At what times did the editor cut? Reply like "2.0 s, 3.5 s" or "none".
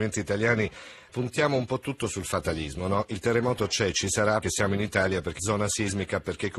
1.1 s, 4.4 s, 5.4 s